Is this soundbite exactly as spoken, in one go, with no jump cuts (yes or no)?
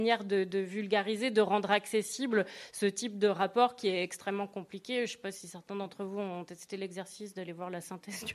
yes